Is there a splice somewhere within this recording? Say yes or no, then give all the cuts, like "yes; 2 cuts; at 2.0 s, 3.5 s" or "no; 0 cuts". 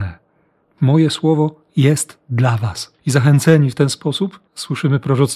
yes; 2 cuts; at 3.0 s, 4.5 s